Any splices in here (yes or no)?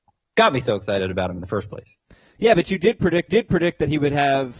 yes